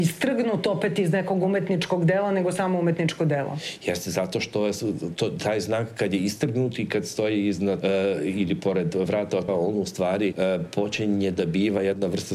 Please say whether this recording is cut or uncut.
cut